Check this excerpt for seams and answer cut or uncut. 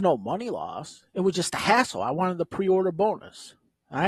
uncut